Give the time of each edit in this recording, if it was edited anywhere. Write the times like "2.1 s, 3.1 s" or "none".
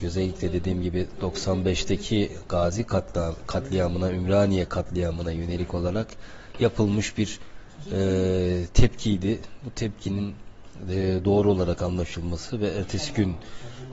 none